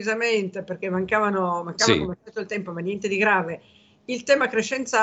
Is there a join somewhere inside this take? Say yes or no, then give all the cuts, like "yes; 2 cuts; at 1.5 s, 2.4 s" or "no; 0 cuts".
no; 0 cuts